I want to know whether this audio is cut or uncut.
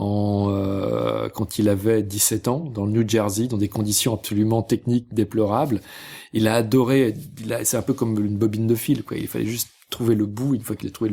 uncut